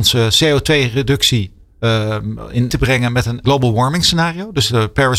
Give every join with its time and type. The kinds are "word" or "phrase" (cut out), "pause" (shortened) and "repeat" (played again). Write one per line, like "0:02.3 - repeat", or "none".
0:02.7 - phrase
0:03.4 - phrase